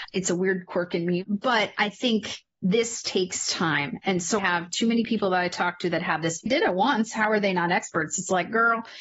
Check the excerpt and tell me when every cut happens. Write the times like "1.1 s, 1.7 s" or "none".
4.4 s, 6.5 s